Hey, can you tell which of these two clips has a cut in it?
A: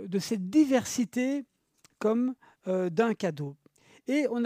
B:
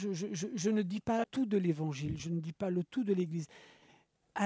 B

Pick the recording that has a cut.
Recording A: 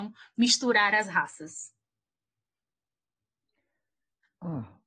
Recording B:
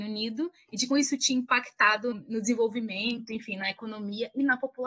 B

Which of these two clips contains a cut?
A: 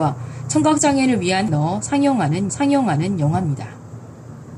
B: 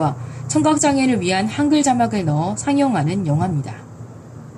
A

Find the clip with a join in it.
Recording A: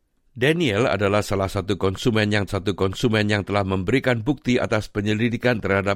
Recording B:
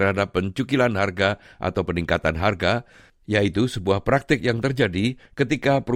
A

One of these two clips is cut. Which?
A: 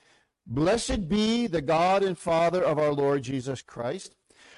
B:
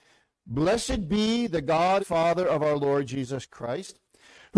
B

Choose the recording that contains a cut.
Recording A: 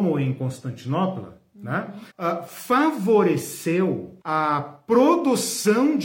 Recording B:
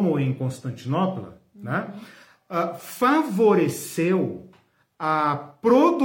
A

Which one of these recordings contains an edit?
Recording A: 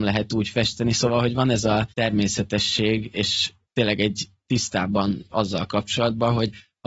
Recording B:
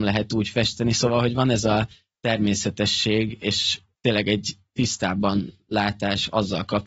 A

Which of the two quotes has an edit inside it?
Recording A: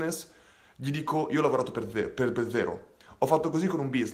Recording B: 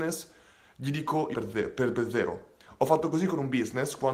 B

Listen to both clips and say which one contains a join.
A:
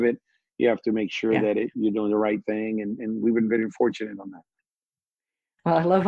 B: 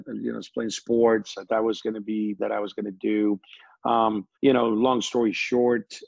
B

